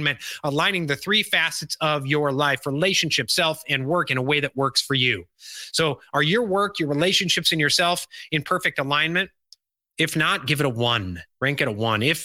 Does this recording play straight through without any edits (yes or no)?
yes